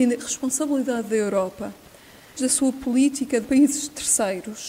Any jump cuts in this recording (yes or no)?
yes